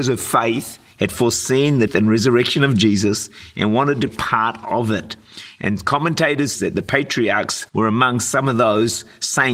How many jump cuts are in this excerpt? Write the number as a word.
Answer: four